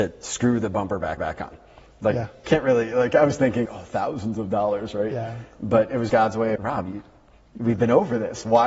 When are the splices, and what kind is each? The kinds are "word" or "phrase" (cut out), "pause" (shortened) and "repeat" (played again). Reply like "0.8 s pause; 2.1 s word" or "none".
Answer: 1.2 s repeat; 3.7 s word; 6.1 s word; 6.6 s phrase